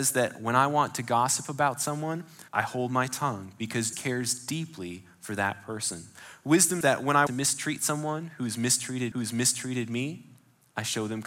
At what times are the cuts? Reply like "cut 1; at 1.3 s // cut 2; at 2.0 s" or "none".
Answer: cut 1; at 2.5 s // cut 2; at 3.9 s // cut 3; at 6.8 s // cut 4; at 7.3 s // cut 5; at 9.1 s